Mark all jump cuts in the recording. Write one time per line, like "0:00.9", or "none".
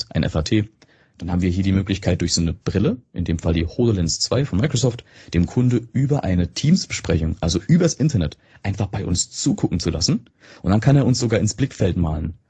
none